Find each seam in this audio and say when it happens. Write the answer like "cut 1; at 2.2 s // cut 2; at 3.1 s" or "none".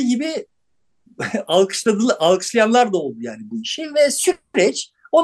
none